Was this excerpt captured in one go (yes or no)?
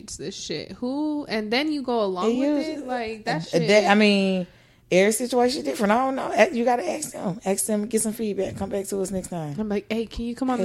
yes